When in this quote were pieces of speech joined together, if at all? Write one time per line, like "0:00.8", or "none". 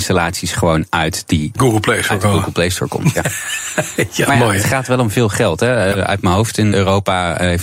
0:01.5
0:06.7